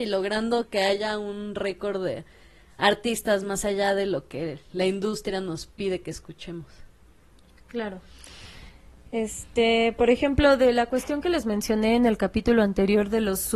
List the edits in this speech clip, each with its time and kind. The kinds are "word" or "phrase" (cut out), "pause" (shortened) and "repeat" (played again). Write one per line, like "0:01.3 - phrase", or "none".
none